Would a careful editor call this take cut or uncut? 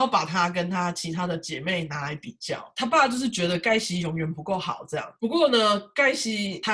uncut